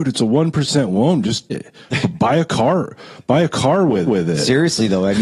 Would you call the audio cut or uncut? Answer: cut